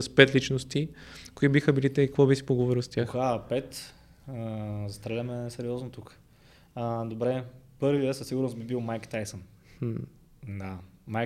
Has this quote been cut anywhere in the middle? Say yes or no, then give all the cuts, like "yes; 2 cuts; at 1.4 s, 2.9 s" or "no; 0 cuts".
no; 0 cuts